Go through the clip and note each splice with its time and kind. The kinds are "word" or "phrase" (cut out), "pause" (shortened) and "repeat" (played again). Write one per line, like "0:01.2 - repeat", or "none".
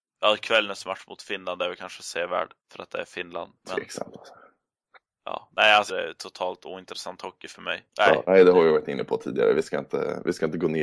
0:02.6 - pause
0:05.9 - phrase
0:07.9 - pause

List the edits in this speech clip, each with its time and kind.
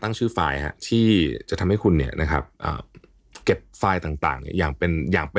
0:03.4 - pause

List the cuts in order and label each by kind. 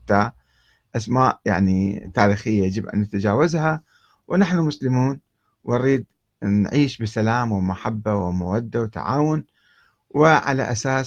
none

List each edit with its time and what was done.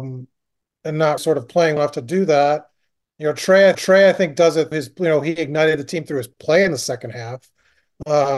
0:01.2 - word
0:01.8 - word
0:03.7 - repeat
0:04.7 - word

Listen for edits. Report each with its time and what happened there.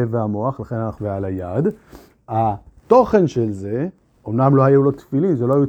0:01.0 - phrase

